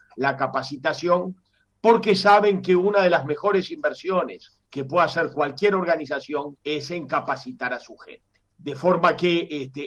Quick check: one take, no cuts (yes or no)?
no